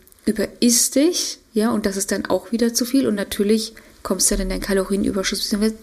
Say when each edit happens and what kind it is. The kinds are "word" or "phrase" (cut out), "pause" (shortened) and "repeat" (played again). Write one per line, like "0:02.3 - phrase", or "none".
none